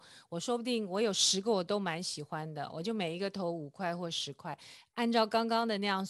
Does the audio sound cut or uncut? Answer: uncut